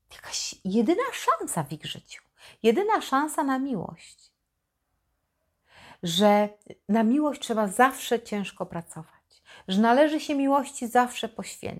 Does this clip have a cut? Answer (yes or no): no